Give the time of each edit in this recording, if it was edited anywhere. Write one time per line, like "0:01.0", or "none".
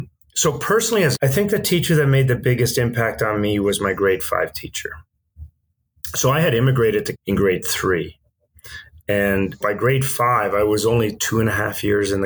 0:01.1
0:07.1
0:09.6